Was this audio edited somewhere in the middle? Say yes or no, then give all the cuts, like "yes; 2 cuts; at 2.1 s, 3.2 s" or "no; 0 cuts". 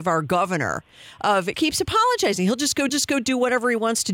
yes; 2 cuts; at 1.5 s, 2.9 s